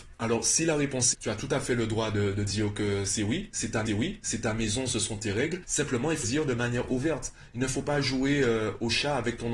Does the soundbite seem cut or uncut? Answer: cut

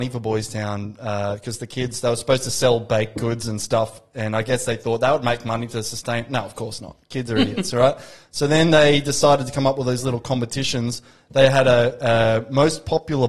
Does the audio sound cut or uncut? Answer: uncut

